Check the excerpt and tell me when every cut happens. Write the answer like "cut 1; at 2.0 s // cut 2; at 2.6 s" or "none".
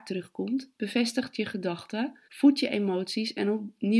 cut 1; at 2.2 s